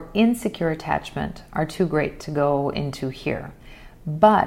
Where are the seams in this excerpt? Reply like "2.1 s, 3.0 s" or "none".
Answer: none